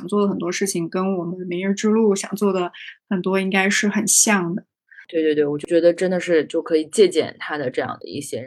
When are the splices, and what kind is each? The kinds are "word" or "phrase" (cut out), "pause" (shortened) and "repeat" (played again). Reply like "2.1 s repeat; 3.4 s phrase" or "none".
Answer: none

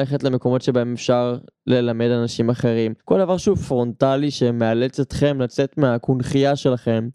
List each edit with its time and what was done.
3.0 s pause

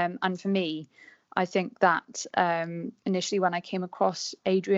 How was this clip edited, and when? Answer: 3.0 s pause

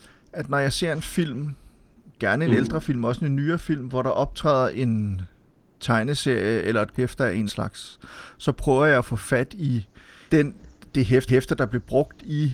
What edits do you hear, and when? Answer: 6.9 s word; 7.5 s word; 10.3 s word; 11.3 s repeat

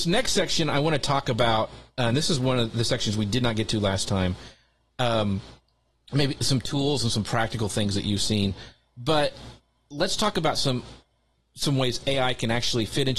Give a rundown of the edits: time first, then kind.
none

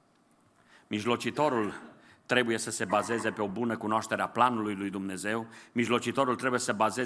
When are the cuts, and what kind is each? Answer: none

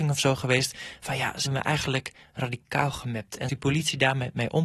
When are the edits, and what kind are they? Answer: 1.5 s word; 3.5 s word

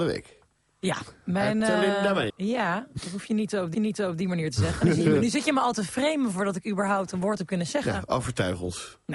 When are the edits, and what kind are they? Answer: 2.3 s word; 3.7 s repeat

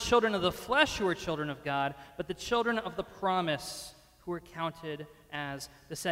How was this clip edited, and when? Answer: none

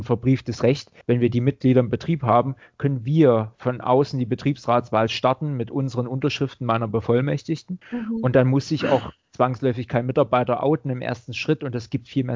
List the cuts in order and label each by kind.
1.0 s pause; 7.8 s pause

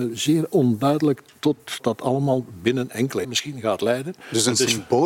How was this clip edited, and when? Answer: 1.8 s word; 3.2 s word

